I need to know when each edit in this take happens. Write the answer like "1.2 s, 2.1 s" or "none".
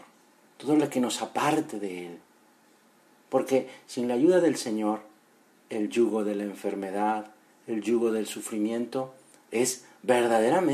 none